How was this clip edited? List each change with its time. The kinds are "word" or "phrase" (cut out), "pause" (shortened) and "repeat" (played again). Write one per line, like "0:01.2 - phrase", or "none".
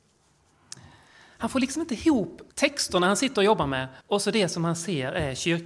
0:02.5 - pause
0:04.0 - pause